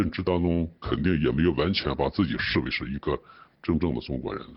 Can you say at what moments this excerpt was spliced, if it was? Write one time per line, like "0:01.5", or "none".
none